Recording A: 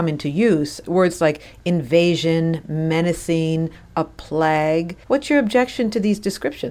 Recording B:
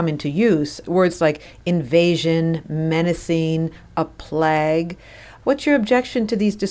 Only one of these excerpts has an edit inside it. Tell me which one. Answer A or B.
A